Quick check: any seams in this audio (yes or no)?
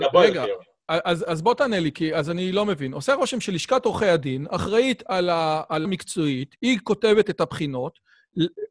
yes